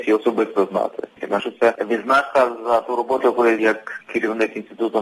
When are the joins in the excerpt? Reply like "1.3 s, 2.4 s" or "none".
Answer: 1.4 s, 3.6 s